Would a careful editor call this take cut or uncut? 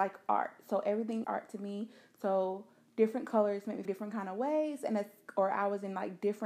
cut